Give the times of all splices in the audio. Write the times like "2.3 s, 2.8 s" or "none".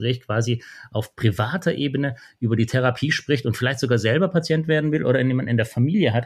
none